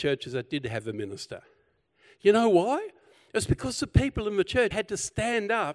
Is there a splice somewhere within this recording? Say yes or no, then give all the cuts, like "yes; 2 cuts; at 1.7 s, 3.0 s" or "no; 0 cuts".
yes; 1 cut; at 4.7 s